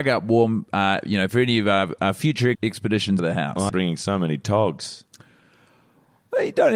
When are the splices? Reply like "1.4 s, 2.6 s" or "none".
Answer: 1.3 s, 2.5 s, 3.2 s, 3.7 s